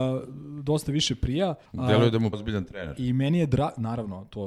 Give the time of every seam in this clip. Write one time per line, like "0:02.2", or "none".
0:01.6
0:02.3